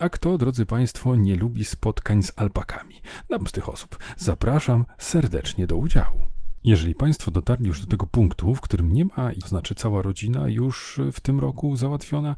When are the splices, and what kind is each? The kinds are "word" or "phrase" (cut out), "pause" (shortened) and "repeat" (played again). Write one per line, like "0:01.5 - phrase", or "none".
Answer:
0:03.4 - phrase
0:09.4 - phrase